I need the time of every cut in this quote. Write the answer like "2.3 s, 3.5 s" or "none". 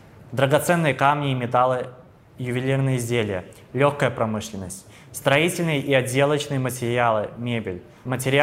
none